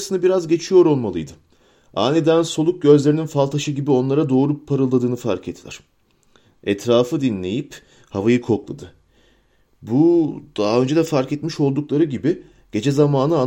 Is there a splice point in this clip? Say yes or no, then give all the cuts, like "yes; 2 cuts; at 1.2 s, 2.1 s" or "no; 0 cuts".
no; 0 cuts